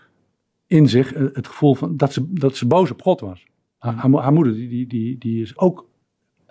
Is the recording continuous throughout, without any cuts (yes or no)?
no